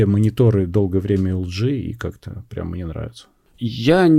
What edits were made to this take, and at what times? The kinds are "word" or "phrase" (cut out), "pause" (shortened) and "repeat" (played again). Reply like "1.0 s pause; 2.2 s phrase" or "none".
none